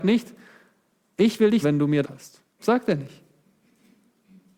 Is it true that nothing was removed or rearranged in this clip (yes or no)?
no